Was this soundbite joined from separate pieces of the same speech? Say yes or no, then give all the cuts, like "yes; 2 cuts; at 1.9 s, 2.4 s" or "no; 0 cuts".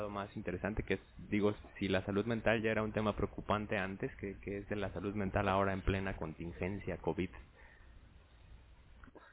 no; 0 cuts